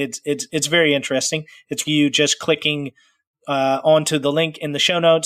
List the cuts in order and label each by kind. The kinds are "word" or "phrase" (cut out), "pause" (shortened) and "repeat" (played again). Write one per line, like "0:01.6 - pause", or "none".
0:01.8 - word